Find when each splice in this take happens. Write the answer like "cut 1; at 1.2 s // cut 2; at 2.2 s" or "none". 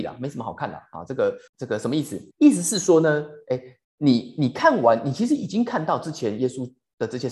cut 1; at 1.5 s // cut 2; at 2.3 s // cut 3; at 3.8 s